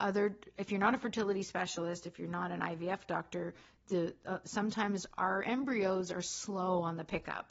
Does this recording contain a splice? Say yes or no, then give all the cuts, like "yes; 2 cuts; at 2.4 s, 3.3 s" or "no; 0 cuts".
no; 0 cuts